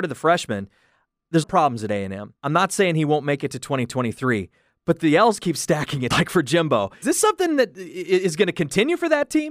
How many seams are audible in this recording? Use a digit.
4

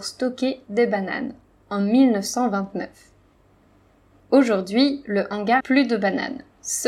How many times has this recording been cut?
1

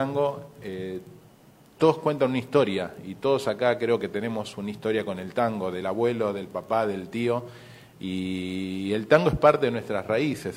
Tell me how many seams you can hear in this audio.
0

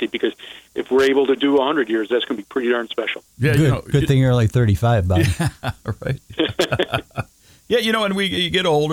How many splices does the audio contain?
1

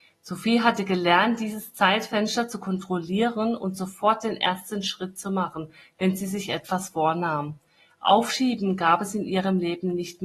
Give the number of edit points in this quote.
0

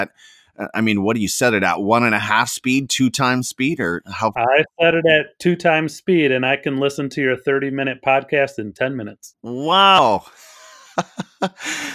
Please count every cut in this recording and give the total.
0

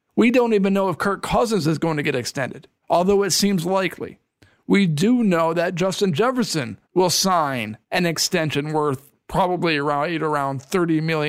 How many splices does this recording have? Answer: 3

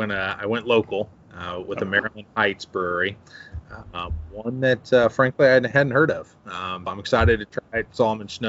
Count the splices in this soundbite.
1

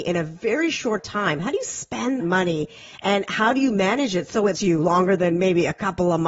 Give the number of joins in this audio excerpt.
3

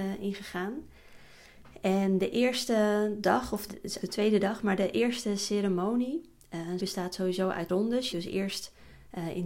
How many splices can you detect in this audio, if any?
5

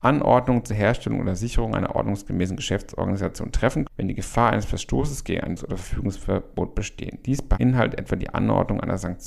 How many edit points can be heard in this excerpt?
2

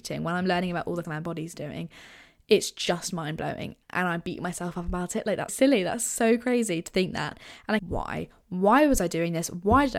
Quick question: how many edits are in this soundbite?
4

